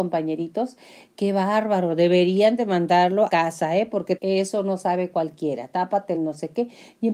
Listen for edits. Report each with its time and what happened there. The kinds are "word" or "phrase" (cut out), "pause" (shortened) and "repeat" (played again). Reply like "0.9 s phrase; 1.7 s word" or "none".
3.3 s word; 4.2 s word; 6.2 s phrase